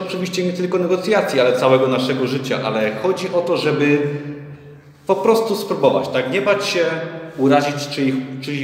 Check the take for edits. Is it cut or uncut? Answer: uncut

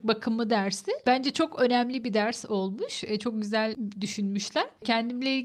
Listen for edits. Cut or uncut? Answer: uncut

